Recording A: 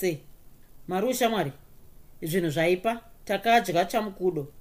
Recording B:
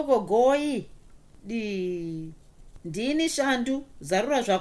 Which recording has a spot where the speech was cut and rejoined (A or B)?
A